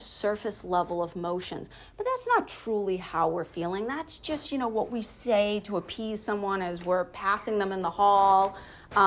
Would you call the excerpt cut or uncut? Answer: uncut